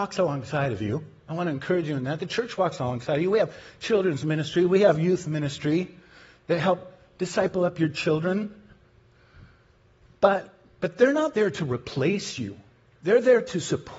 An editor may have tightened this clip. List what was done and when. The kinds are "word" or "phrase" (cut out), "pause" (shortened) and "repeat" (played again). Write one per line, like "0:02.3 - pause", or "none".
none